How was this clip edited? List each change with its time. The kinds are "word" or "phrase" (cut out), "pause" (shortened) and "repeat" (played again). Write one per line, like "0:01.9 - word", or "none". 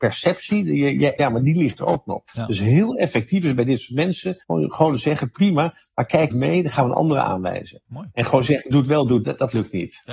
0:01.2 - word
0:02.3 - pause
0:04.4 - pause
0:06.3 - word
0:07.8 - pause
0:09.2 - word